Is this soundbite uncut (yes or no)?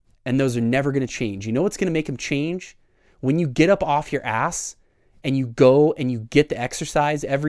yes